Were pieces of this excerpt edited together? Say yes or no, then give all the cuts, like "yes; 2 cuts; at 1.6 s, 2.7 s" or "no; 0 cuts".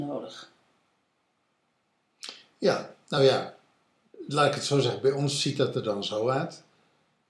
no; 0 cuts